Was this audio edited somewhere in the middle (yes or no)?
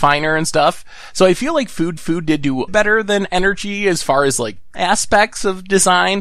yes